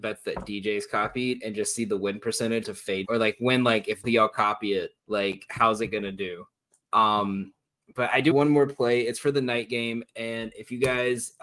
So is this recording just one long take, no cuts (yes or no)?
no